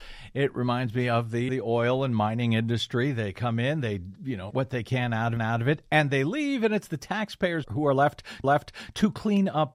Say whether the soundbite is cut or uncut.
cut